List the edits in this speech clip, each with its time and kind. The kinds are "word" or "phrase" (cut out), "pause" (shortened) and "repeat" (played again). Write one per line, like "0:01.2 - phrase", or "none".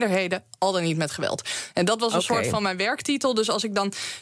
none